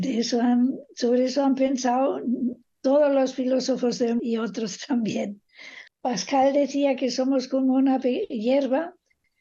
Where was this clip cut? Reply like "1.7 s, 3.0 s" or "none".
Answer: 4.2 s, 5.9 s